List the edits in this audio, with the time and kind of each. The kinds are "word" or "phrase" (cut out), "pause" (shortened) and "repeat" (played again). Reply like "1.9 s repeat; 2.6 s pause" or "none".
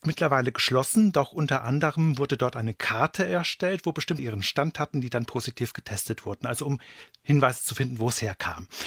4.2 s phrase